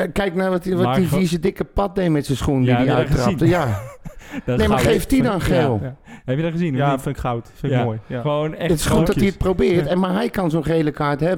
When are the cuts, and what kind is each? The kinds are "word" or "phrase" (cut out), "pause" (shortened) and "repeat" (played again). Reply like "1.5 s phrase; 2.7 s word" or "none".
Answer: none